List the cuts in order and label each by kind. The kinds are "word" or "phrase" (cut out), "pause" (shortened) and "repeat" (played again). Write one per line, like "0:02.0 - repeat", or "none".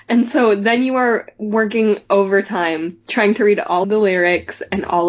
0:03.8 - word